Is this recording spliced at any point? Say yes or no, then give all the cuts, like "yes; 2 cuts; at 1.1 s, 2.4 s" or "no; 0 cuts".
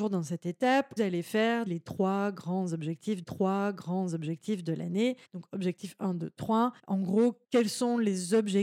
yes; 6 cuts; at 1.0 s, 1.7 s, 3.2 s, 5.2 s, 6.8 s, 7.4 s